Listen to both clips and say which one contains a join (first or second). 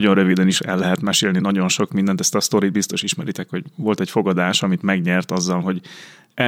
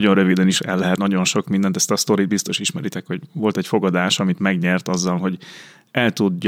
second